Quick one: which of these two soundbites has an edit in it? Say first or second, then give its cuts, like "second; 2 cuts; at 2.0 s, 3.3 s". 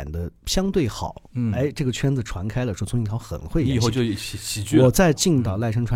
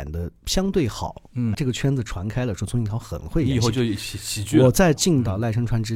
second; 1 cut; at 1.5 s